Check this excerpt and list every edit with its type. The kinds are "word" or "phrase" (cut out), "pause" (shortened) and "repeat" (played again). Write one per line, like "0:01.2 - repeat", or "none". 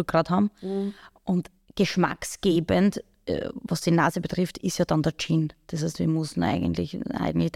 none